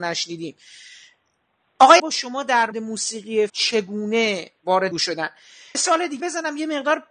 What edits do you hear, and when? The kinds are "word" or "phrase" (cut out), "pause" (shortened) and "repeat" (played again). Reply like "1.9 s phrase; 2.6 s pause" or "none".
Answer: 2.0 s word; 2.7 s word; 3.5 s word; 4.9 s word; 5.7 s word; 6.2 s word